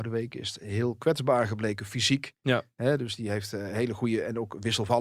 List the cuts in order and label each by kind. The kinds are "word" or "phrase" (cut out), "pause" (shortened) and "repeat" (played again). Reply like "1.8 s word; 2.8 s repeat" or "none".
none